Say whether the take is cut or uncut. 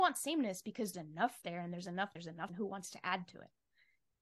cut